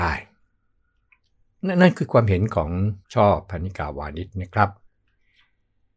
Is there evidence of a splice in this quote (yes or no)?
yes